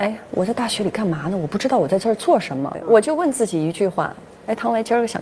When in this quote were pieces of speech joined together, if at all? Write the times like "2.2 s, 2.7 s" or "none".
none